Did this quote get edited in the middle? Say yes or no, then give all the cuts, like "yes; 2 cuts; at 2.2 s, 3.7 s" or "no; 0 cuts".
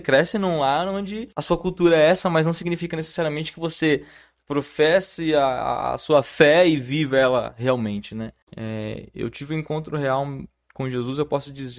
yes; 2 cuts; at 1.3 s, 8.4 s